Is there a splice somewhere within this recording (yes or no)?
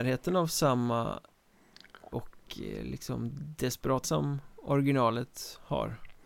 yes